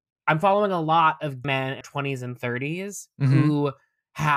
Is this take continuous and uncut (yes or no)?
no